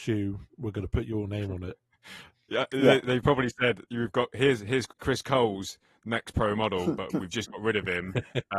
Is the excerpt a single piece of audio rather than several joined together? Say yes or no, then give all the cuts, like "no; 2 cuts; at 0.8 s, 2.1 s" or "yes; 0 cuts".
no; 1 cut; at 4.9 s